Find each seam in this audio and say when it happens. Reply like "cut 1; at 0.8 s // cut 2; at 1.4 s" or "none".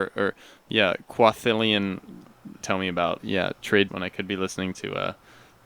cut 1; at 2.6 s // cut 2; at 3.2 s // cut 3; at 3.9 s

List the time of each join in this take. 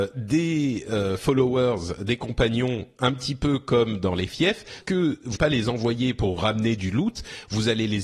cut 1; at 4.8 s // cut 2; at 5.4 s // cut 3; at 6.4 s

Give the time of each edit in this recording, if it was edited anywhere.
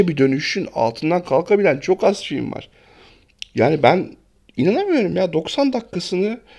none

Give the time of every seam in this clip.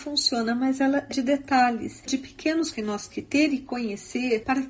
cut 1; at 1.1 s // cut 2; at 2.1 s // cut 3; at 2.7 s // cut 4; at 3.1 s

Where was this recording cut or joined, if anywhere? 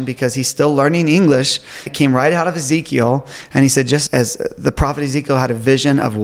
cut 1; at 1.9 s // cut 2; at 4.1 s

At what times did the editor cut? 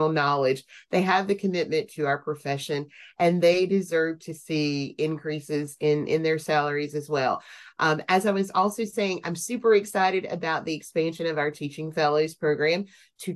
none

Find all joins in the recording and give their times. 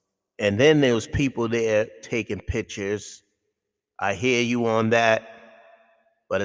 none

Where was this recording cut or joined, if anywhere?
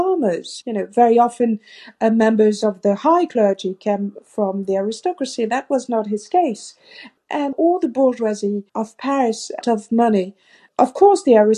cut 1; at 7.5 s // cut 2; at 8.7 s // cut 3; at 9.6 s

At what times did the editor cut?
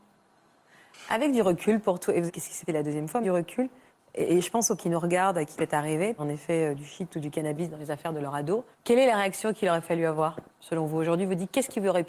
cut 1; at 2.3 s // cut 2; at 2.7 s // cut 3; at 3.2 s // cut 4; at 3.9 s // cut 5; at 4.8 s // cut 6; at 5.5 s // cut 7; at 6.2 s // cut 8; at 8.7 s // cut 9; at 10.5 s

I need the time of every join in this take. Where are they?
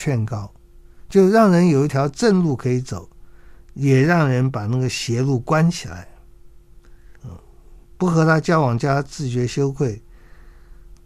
cut 1; at 7.2 s

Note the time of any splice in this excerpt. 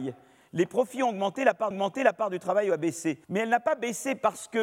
cut 1; at 1.7 s // cut 2; at 3.2 s

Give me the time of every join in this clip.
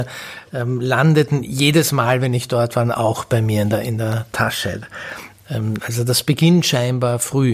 none

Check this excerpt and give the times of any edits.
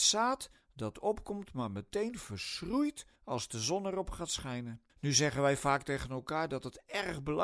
cut 1; at 3.2 s // cut 2; at 4.9 s

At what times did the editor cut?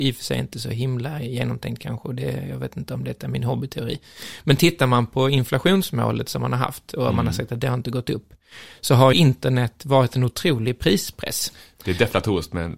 cut 1; at 9.1 s

